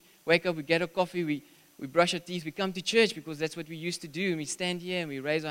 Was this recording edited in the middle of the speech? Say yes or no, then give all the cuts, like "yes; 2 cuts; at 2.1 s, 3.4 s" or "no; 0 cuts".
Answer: no; 0 cuts